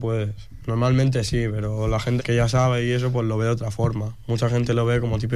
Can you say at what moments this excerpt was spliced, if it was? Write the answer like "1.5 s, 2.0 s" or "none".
2.2 s